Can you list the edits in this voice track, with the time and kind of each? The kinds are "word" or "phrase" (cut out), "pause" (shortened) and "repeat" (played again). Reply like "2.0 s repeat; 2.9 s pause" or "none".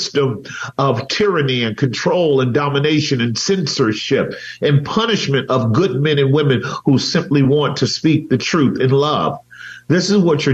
none